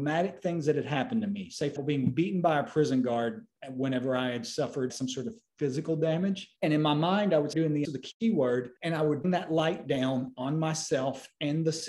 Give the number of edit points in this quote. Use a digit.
7